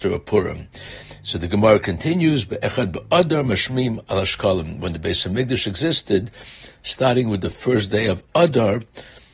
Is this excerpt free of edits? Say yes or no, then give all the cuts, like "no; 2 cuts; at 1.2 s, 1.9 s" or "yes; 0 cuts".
yes; 0 cuts